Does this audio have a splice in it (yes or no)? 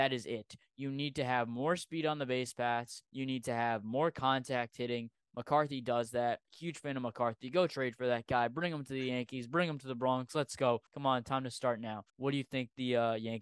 yes